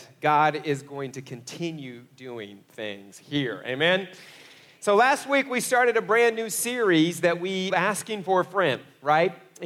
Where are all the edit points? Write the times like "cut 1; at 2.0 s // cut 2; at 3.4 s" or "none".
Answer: cut 1; at 7.7 s